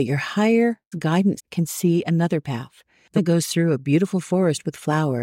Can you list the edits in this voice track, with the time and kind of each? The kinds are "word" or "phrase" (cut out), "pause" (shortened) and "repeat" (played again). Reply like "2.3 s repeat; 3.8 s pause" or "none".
0.9 s word; 1.4 s word; 3.2 s word